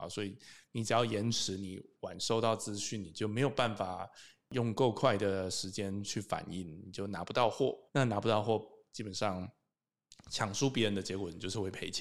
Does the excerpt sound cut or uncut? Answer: cut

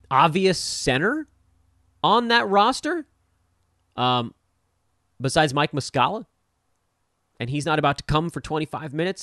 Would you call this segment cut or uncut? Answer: uncut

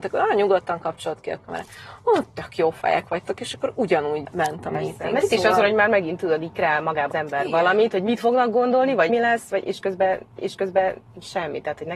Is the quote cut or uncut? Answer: cut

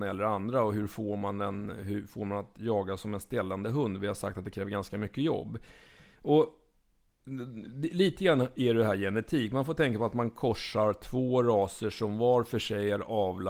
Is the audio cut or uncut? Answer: uncut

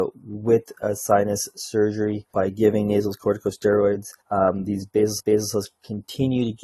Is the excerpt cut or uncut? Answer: cut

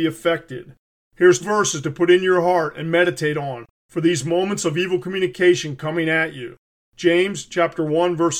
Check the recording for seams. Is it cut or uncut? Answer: cut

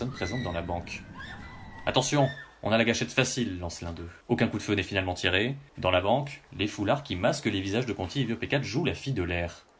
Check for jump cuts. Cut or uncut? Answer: cut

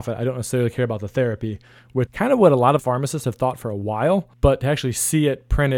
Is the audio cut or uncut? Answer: cut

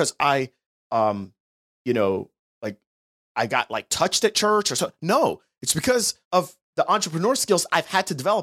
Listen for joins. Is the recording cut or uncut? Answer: cut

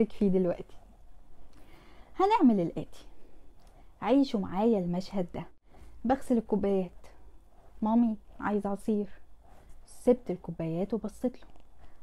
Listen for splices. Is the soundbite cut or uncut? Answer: uncut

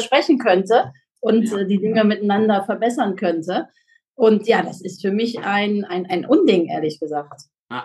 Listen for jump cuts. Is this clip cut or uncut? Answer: uncut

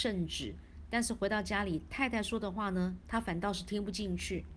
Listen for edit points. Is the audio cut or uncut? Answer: uncut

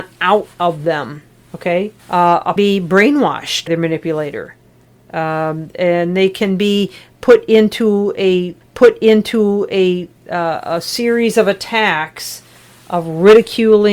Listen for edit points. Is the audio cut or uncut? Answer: cut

